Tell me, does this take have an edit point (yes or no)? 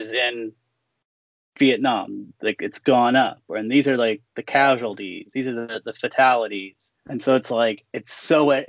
yes